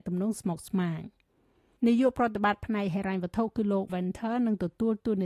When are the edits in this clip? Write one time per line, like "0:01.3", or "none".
0:03.9